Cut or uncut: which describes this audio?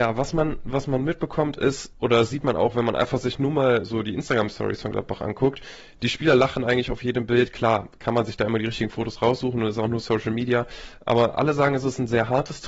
cut